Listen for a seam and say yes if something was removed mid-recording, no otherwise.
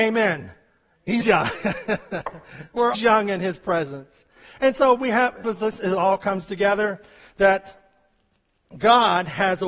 yes